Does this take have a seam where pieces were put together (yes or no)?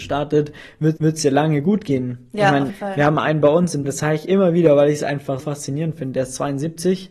yes